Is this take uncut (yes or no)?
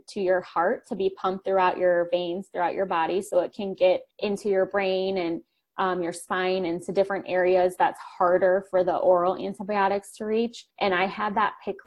no